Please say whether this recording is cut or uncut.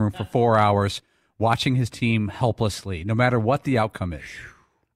uncut